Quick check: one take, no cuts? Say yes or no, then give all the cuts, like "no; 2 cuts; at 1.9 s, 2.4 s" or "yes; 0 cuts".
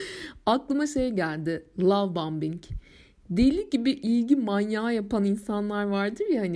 yes; 0 cuts